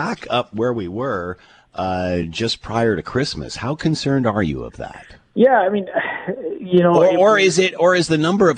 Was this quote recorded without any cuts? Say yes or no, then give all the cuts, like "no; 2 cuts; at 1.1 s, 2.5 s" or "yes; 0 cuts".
yes; 0 cuts